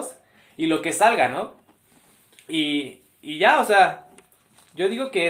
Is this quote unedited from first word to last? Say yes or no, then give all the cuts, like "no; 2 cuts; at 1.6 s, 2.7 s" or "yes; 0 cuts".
yes; 0 cuts